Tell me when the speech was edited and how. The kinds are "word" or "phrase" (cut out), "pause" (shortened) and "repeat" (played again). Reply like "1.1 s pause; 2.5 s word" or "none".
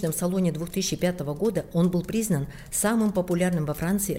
none

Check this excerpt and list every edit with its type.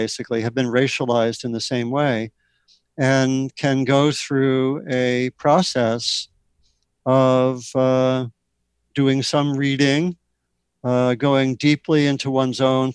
none

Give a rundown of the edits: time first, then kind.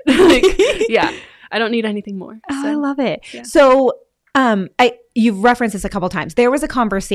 none

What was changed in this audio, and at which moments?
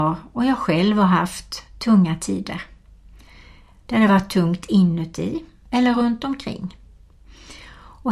none

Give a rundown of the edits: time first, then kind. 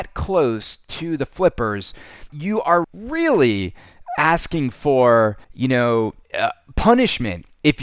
2.3 s word; 2.8 s word; 5.4 s pause; 6.2 s pause

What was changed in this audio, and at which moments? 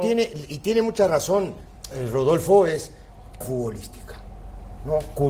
3.4 s word

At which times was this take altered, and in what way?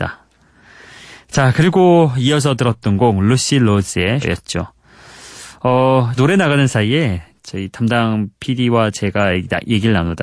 4.2 s word; 6.2 s word

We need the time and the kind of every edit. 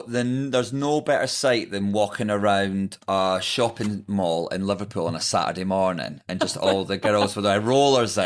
none

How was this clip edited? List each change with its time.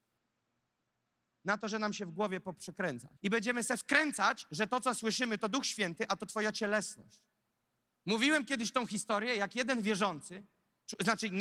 3.2 s pause; 7.4 s pause

